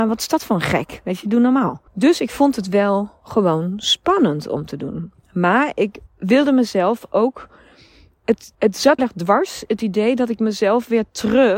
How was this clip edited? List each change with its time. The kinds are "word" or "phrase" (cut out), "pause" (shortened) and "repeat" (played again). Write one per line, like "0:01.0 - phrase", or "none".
0:01.9 - pause
0:06.1 - pause
0:08.5 - pause
0:09.0 - phrase